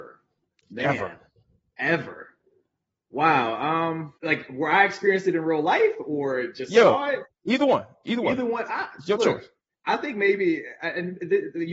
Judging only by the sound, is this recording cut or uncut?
cut